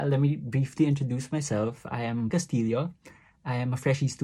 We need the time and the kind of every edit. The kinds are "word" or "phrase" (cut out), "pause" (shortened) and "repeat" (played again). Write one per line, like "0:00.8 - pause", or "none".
0:02.3 - word